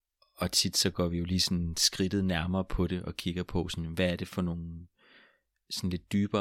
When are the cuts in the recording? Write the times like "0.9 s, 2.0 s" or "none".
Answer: none